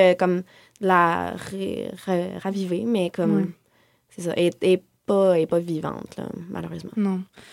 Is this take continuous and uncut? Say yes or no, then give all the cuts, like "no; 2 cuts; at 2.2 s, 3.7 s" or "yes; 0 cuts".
yes; 0 cuts